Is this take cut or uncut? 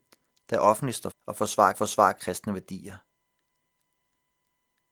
cut